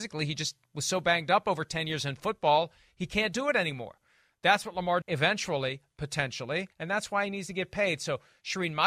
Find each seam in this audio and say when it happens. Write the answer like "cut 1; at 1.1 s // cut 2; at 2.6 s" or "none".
cut 1; at 5.0 s // cut 2; at 6.7 s